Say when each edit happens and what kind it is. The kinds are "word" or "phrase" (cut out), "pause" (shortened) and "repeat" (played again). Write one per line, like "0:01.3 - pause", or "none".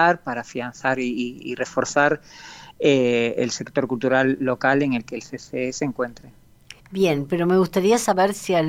0:06.8 - pause